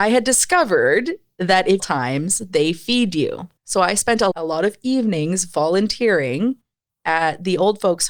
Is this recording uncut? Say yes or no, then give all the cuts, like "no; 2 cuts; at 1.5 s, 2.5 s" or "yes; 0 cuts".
no; 3 cuts; at 1.8 s, 3.6 s, 4.3 s